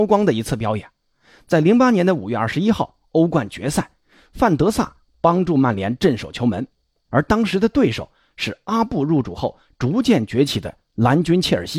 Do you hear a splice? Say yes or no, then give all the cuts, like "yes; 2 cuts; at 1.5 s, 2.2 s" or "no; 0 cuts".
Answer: no; 0 cuts